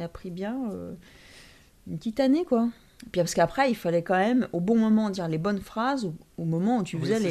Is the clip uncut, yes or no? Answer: yes